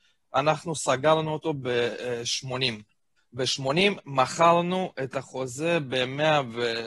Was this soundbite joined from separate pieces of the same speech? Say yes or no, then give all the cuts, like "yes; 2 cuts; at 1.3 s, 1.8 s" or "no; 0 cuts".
yes; 1 cut; at 3.2 s